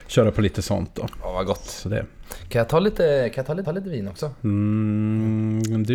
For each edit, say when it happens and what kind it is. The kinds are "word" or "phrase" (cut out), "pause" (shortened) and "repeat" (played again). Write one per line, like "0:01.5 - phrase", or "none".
0:03.6 - repeat